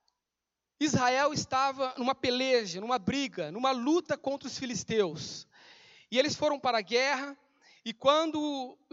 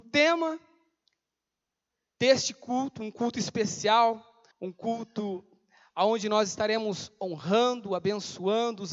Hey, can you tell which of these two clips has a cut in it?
second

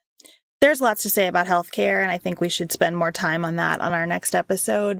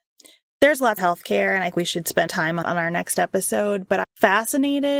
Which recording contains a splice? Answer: second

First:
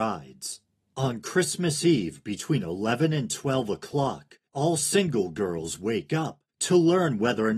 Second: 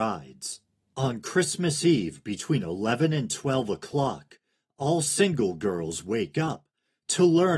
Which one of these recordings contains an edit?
first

